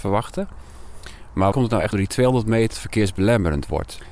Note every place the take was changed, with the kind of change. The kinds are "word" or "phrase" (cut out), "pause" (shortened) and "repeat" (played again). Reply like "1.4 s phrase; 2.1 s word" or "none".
1.5 s word; 1.9 s word; 2.7 s word